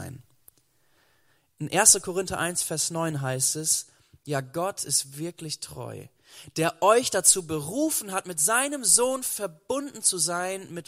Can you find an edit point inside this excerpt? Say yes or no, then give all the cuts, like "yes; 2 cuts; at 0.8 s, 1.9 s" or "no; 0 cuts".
no; 0 cuts